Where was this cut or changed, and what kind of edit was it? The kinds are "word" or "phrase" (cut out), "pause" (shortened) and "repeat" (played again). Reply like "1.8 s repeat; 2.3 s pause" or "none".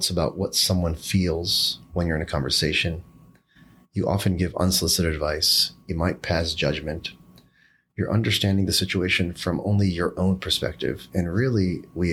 none